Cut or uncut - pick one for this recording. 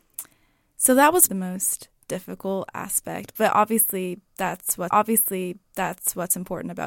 cut